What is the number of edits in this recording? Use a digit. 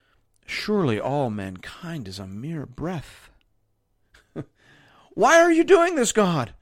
0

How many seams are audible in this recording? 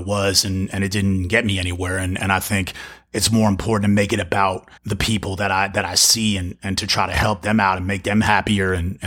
1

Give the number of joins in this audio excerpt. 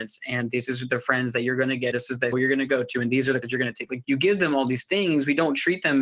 4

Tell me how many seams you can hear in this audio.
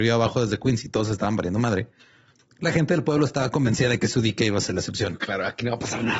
0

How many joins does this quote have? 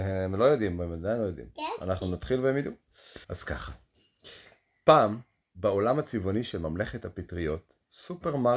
2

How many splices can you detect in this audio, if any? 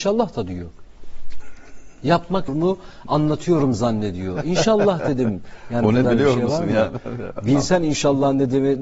2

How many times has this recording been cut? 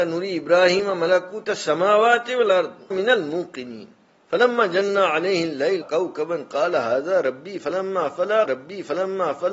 4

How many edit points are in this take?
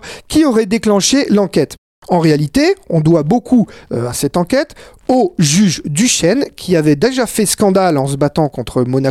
0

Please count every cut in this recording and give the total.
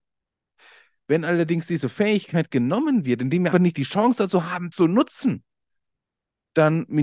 2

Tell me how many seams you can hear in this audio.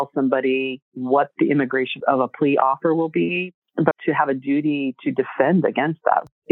2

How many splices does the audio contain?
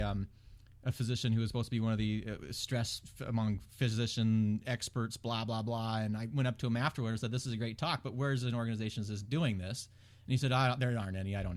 0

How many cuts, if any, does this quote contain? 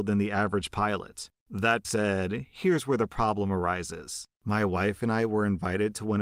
1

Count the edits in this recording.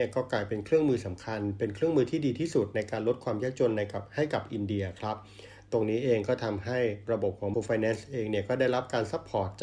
1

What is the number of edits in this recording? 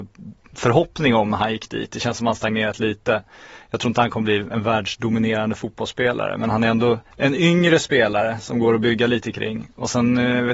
1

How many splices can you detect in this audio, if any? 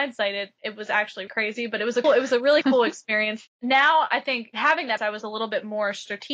3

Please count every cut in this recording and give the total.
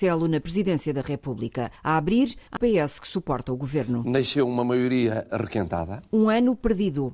1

